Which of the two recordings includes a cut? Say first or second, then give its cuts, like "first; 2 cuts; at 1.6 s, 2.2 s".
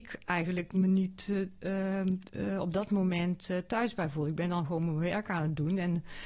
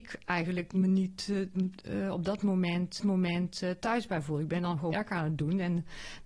second; 3 cuts; at 1.5 s, 3.0 s, 4.9 s